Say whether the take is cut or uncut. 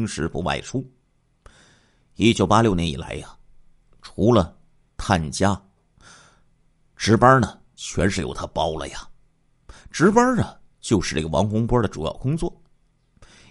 uncut